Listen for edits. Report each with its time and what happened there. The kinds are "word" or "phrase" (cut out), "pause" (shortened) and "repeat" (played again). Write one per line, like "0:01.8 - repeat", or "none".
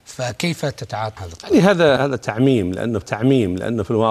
0:01.2 - word
0:02.0 - word
0:03.0 - repeat